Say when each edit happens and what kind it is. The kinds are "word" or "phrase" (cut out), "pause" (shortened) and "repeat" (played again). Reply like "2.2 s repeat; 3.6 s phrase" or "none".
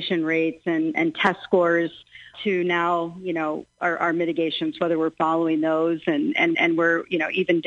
2.3 s word; 6.5 s repeat